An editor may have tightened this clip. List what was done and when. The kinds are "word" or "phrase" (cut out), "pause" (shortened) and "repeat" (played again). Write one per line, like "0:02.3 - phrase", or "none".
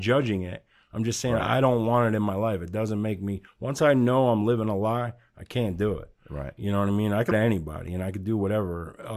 0:07.3 - word